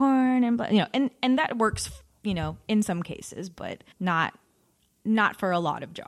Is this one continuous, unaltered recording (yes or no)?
no